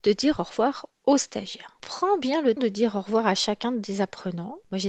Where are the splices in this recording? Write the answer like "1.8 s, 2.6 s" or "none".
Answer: 2.6 s